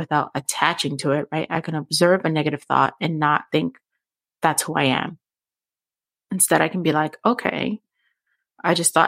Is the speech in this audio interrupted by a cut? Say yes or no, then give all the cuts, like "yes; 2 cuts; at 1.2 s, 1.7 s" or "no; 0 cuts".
no; 0 cuts